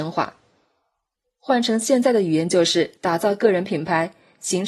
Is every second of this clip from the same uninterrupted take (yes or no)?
no